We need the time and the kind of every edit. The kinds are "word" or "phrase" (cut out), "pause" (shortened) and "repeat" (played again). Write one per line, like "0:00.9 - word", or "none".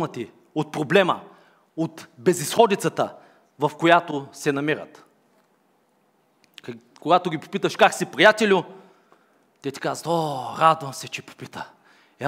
none